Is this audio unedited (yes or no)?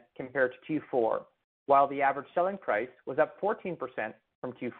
yes